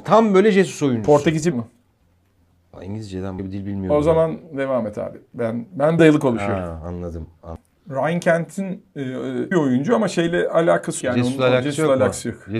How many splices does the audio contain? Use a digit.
5